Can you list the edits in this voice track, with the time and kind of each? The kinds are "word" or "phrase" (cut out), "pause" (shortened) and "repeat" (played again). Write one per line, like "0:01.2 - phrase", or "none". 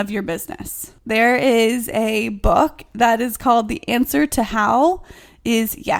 0:01.0 - pause